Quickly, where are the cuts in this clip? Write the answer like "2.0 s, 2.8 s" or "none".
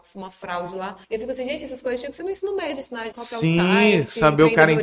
1.0 s, 3.1 s